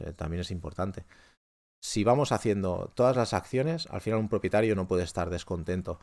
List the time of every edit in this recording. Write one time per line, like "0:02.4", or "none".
none